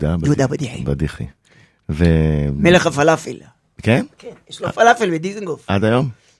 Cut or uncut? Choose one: uncut